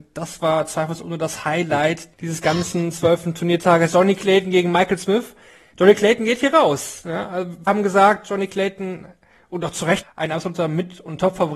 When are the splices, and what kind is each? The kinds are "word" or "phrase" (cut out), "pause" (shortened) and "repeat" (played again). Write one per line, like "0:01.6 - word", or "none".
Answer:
0:02.1 - pause
0:07.7 - word
0:10.0 - phrase